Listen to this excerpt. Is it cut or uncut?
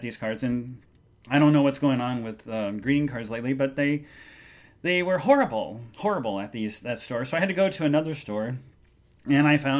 uncut